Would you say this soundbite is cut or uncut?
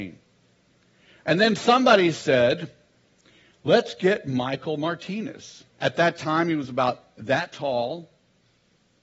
cut